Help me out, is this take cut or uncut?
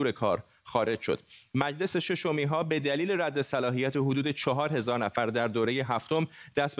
uncut